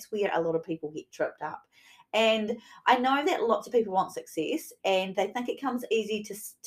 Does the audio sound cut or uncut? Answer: uncut